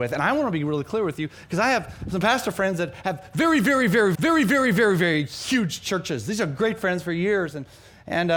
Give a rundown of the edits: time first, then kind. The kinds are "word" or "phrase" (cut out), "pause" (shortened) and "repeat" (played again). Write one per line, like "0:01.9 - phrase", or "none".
0:04.1 - repeat